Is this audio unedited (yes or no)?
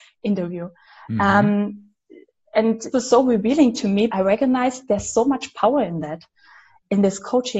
no